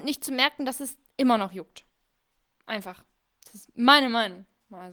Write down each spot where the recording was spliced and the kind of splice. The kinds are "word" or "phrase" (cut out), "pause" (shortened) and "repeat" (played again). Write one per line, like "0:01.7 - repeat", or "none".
none